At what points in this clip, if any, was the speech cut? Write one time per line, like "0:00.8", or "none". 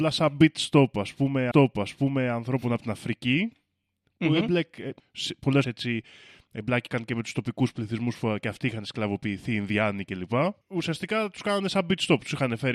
0:01.5
0:05.6
0:10.6

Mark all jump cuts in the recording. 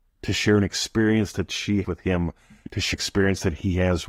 0:01.8
0:02.9

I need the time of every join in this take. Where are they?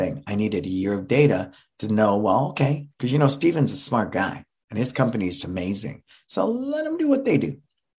0:02.9
0:05.4

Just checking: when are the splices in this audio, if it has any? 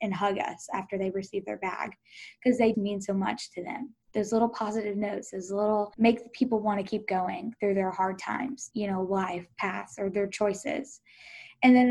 0:02.7
0:04.0
0:05.9
0:08.7

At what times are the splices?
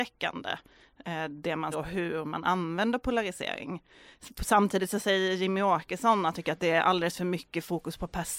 0:01.7
0:06.3

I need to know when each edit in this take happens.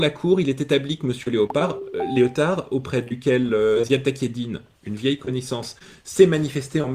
none

